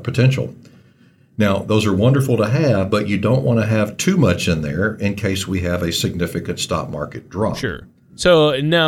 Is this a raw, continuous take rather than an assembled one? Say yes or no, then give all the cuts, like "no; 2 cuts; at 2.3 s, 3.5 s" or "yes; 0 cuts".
yes; 0 cuts